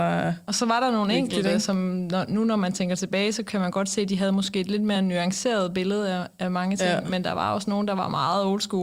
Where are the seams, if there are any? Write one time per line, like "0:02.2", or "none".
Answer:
none

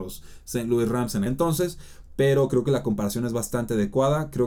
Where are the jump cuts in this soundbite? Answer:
0:01.3

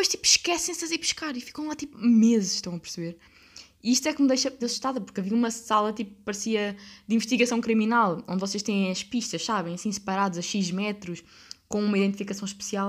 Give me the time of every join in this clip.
0:04.6

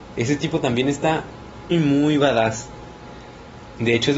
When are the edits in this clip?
0:01.7

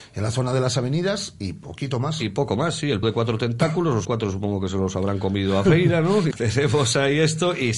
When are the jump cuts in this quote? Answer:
0:03.0
0:04.0
0:06.3

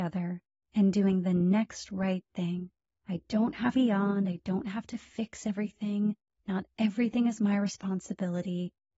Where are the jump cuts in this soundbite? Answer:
0:03.8

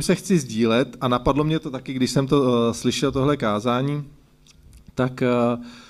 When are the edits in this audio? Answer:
none

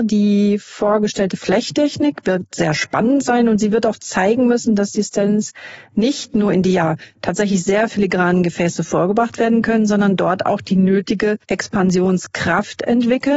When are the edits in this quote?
0:11.4

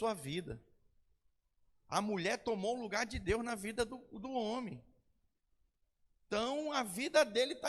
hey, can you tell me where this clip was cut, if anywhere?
none

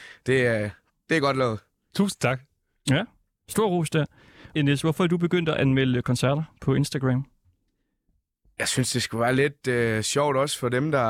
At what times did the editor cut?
0:04.6

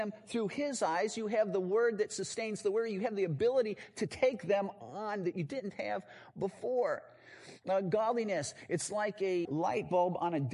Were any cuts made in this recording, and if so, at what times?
0:09.4

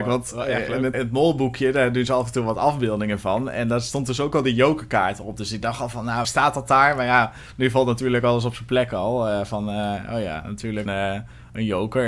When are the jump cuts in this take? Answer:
0:00.9
0:06.2
0:10.9

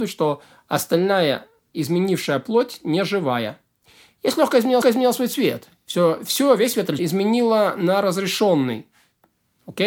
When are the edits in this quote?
0:04.8
0:07.0

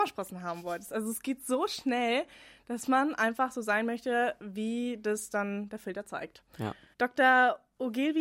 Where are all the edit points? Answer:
none

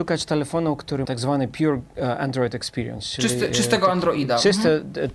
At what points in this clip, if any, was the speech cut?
0:01.0

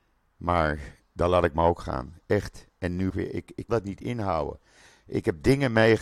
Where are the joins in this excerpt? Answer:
0:03.1
0:03.7

